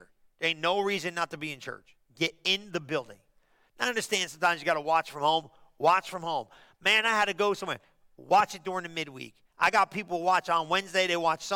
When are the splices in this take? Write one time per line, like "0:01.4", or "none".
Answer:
none